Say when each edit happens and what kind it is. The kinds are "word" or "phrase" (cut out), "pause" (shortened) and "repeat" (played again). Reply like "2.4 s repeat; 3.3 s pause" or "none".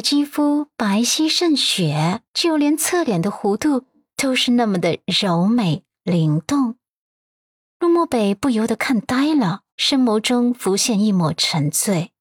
2.3 s pause; 9.7 s pause